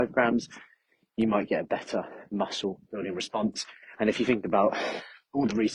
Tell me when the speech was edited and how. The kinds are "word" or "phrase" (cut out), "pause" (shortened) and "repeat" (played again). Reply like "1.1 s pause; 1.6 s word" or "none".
none